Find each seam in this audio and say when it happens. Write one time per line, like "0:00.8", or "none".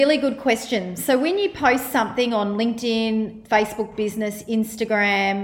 none